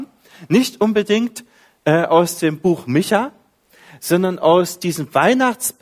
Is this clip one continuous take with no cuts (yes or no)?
yes